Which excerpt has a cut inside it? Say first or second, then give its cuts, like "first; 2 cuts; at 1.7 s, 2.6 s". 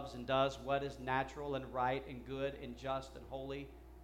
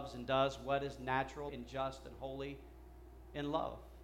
second; 1 cut; at 1.5 s